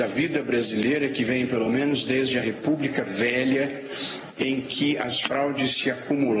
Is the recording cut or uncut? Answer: uncut